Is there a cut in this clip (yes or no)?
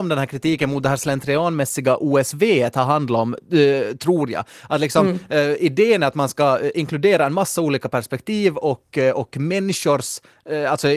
no